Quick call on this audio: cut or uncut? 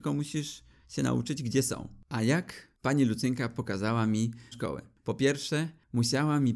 cut